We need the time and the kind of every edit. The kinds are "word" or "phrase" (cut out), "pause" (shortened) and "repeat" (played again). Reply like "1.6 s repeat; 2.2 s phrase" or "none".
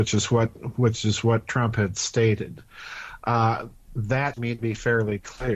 4.3 s word